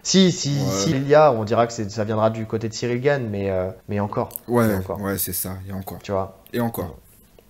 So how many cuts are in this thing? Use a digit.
2